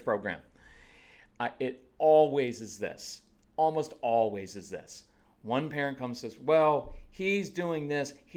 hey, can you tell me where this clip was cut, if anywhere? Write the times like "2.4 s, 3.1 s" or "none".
none